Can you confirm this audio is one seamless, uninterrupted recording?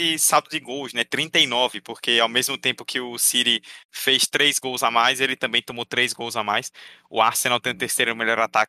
yes; 0 cuts

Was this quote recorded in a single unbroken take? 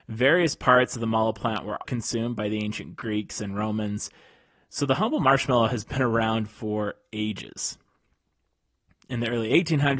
no; 1 cut; at 1.9 s

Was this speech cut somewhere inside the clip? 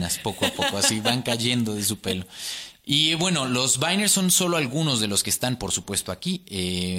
no; 0 cuts

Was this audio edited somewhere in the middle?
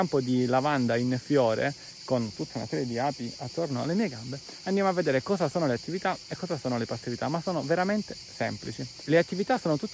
no; 0 cuts

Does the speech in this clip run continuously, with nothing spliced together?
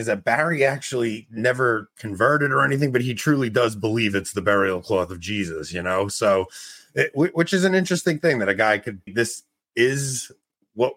no; 1 cut; at 9.1 s

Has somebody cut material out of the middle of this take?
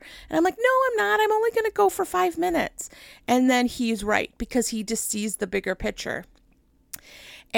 no; 0 cuts

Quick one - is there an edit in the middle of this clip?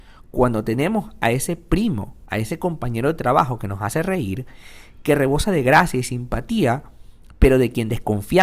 no; 0 cuts

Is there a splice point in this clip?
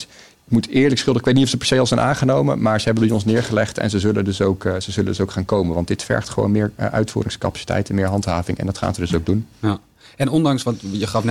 no; 0 cuts

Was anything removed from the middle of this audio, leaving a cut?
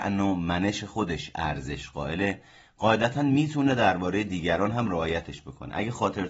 no; 0 cuts

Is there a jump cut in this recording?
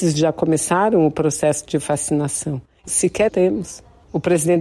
yes; 2 cuts; at 2.9 s, 3.3 s

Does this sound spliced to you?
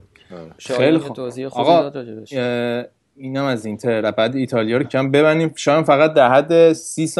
yes; 1 cut; at 4.8 s

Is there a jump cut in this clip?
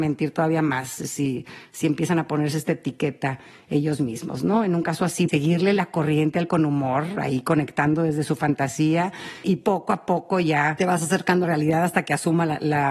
yes; 4 cuts; at 5.3 s, 6.5 s, 9.4 s, 11.4 s

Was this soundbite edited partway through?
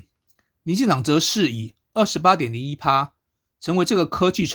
no; 0 cuts

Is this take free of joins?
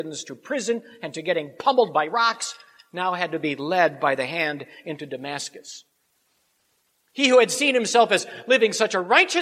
yes; 0 cuts

